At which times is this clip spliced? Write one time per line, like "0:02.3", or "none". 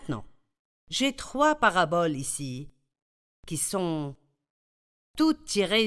none